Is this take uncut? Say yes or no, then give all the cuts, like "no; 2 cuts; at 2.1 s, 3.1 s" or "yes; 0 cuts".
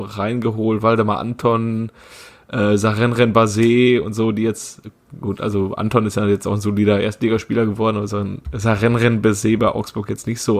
yes; 0 cuts